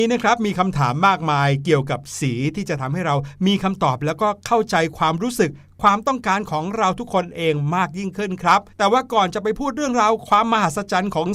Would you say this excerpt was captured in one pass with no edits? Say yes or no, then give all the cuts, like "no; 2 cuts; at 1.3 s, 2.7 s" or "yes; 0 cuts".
no; 1 cut; at 8.7 s